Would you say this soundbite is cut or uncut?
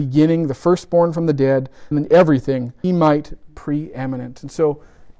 cut